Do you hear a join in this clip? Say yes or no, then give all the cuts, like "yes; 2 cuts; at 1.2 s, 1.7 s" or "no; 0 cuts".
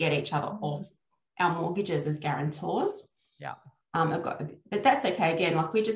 no; 0 cuts